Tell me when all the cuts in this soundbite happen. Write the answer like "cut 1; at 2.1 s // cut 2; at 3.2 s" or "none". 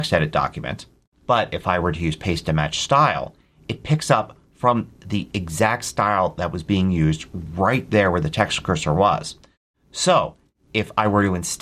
cut 1; at 1.1 s